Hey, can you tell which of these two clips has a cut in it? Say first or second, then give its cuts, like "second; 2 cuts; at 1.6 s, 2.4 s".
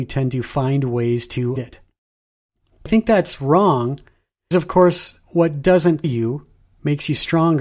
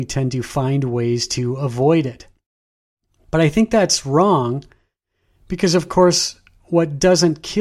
first; 6 cuts; at 1.6 s, 2.9 s, 4.5 s, 5.2 s, 6.0 s, 6.6 s